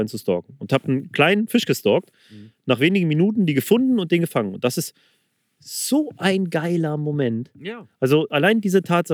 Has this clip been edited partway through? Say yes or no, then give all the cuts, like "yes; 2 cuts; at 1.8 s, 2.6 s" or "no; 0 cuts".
no; 0 cuts